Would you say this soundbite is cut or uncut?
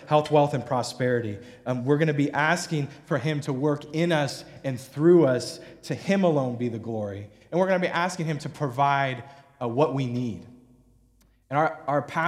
uncut